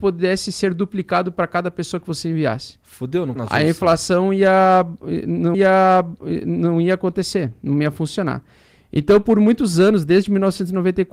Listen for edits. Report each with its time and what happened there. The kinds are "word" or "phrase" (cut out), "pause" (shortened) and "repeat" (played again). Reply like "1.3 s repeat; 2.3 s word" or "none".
3.4 s phrase; 5.5 s repeat